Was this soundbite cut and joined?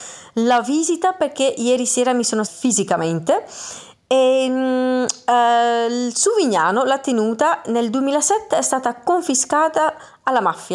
yes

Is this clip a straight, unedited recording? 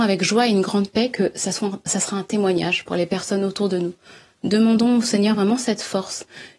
yes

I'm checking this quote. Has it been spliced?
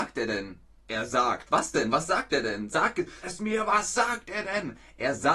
yes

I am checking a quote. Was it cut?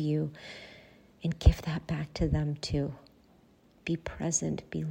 no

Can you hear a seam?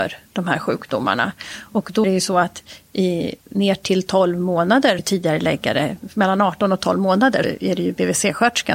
yes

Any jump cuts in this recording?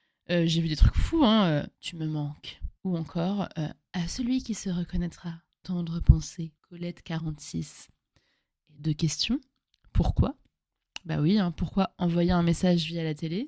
yes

